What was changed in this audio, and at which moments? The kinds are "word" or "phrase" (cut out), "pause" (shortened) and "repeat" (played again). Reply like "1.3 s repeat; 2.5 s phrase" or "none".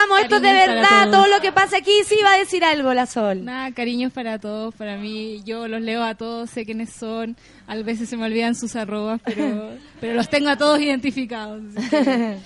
none